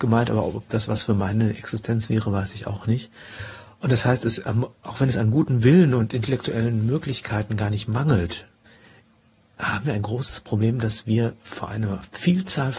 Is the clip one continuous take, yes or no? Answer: yes